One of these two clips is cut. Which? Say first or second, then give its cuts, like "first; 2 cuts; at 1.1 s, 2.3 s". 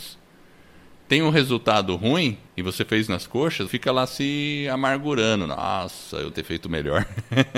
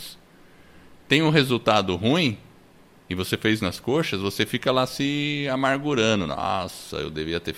first; 3 cuts; at 2.5 s, 3.7 s, 6.3 s